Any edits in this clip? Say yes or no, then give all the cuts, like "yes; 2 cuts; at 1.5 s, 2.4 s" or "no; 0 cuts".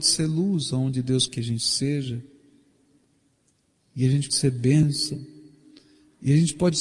yes; 2 cuts; at 1.3 s, 4.3 s